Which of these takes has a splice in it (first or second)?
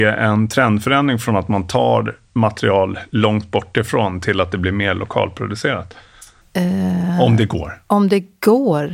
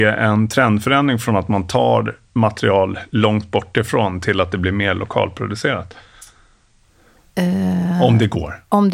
first